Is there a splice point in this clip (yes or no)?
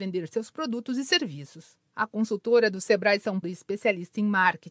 yes